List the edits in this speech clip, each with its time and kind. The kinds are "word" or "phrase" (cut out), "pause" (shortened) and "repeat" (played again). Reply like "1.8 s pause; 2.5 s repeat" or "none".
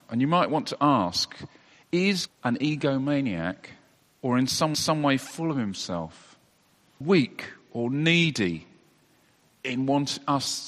2.3 s word; 3.9 s pause; 4.7 s repeat; 7.0 s word